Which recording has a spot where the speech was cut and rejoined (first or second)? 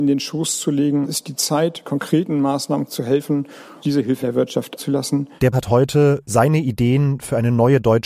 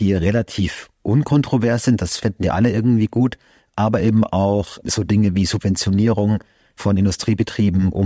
first